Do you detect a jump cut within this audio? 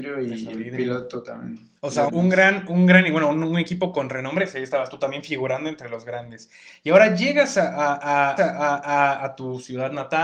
yes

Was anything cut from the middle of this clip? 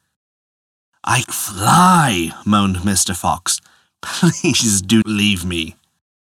yes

